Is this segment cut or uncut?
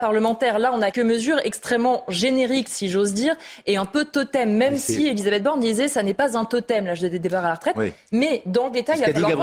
cut